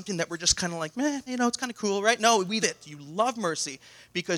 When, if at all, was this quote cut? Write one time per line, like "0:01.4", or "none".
0:01.3
0:02.6